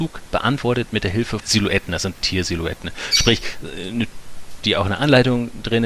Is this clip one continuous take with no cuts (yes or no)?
no